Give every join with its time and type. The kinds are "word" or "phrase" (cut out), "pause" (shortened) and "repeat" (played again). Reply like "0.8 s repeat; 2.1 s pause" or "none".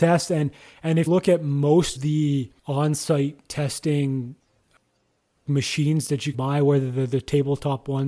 1.1 s word; 2.0 s word; 2.6 s pause; 5.5 s word; 6.3 s word